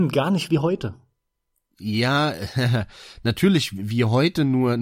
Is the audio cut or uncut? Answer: uncut